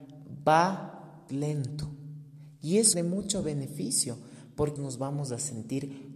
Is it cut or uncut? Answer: cut